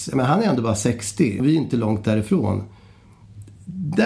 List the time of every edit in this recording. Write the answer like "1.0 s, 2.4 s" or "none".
1.4 s